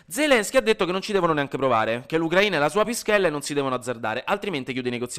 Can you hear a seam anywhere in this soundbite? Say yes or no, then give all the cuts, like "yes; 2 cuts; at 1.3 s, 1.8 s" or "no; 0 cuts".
no; 0 cuts